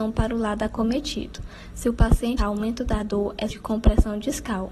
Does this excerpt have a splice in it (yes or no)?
yes